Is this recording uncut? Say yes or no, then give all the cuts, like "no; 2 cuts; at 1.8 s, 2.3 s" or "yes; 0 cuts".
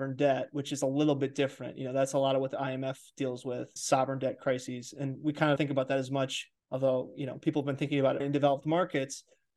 no; 4 cuts; at 3.8 s, 5.6 s, 6.6 s, 8.2 s